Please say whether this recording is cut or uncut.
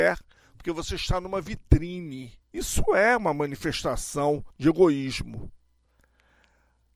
cut